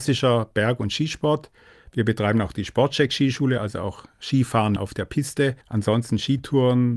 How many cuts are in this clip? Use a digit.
2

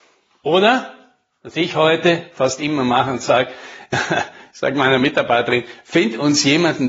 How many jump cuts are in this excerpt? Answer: 0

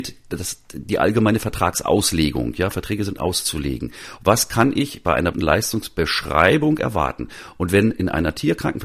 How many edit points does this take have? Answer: 2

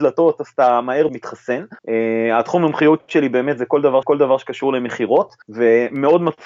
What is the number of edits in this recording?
4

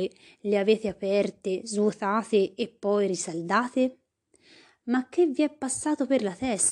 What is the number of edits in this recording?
0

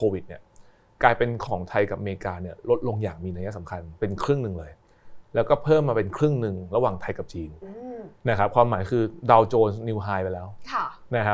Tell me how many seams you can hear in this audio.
1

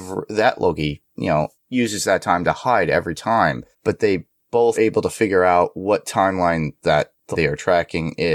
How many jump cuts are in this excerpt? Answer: 3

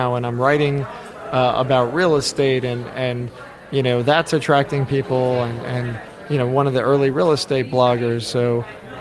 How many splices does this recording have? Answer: 0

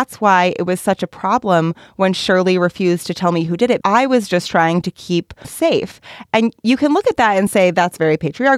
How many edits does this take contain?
2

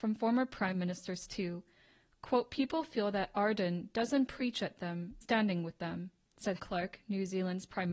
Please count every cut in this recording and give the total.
2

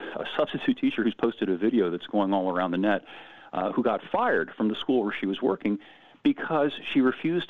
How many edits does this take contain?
0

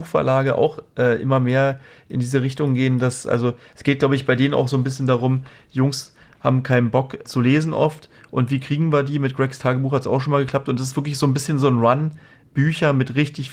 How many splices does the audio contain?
1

